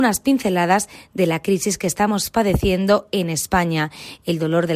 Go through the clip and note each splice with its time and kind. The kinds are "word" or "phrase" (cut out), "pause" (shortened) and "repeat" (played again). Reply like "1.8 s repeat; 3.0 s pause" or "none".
none